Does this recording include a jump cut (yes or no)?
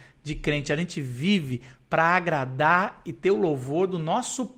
no